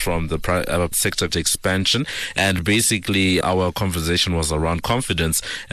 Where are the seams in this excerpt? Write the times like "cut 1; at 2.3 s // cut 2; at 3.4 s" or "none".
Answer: cut 1; at 0.9 s // cut 2; at 1.3 s // cut 3; at 3.4 s // cut 4; at 4.8 s